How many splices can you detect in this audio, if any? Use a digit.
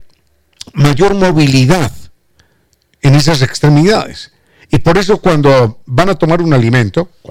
0